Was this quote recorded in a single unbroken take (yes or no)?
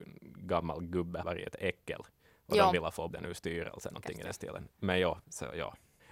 no